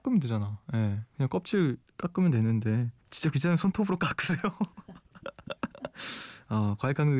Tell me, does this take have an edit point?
yes; 1 cut; at 3.0 s

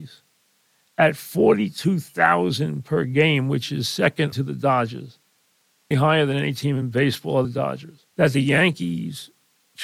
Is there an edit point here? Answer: yes; 4 cuts; at 4.3 s, 5.9 s, 7.4 s, 8.1 s

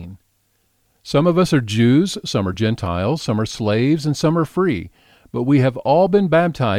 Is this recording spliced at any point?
no; 0 cuts

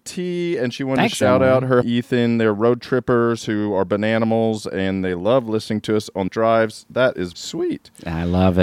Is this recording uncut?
no; 3 cuts; at 1.8 s, 6.3 s, 7.3 s

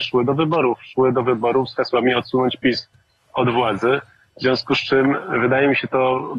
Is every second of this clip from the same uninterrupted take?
yes; 0 cuts

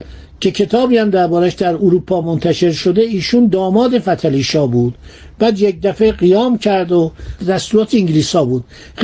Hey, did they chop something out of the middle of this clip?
no; 0 cuts

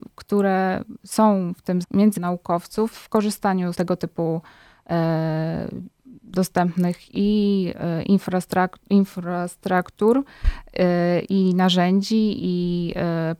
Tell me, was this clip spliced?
yes; 4 cuts; at 1.8 s, 2.2 s, 2.9 s, 3.7 s

